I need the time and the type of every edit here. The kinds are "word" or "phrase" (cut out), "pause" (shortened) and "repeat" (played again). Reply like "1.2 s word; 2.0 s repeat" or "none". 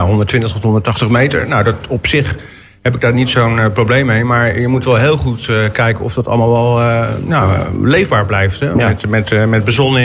none